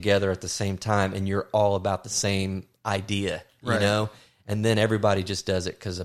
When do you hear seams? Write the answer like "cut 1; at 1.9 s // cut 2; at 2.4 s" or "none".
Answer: none